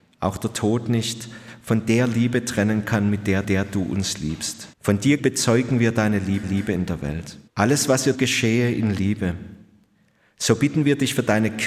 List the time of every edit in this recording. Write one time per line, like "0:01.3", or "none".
0:03.4
0:04.7
0:05.2
0:06.4
0:07.5
0:08.1